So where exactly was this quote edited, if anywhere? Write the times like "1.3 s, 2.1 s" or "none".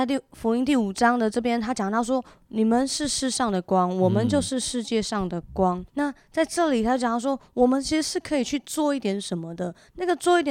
5.9 s